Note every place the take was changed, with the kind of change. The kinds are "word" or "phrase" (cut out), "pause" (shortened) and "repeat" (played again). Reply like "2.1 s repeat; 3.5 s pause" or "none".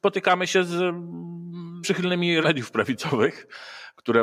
1.8 s word; 2.4 s word